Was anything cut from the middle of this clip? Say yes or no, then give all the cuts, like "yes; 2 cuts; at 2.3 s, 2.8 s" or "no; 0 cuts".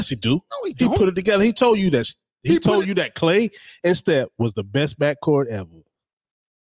no; 0 cuts